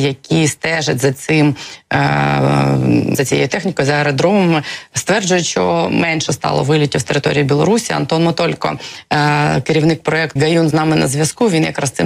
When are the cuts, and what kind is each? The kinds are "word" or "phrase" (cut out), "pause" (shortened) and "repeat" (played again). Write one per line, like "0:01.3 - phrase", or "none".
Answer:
0:03.1 - word
0:10.4 - word
0:10.7 - word